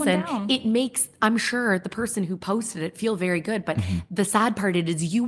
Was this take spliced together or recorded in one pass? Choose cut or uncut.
uncut